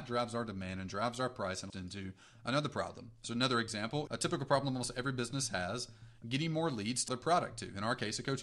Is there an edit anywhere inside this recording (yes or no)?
yes